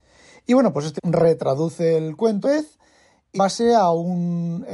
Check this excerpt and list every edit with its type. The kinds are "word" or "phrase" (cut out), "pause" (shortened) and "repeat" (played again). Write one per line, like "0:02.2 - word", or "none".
0:01.0 - word
0:02.4 - word
0:03.4 - word